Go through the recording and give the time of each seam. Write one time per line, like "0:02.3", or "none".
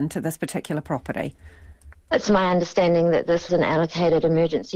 0:03.5